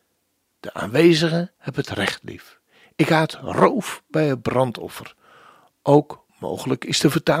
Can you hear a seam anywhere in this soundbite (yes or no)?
yes